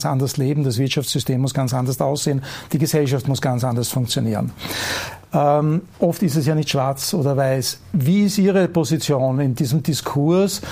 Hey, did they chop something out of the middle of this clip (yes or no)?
yes